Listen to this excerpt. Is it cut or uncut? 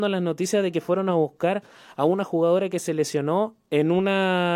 uncut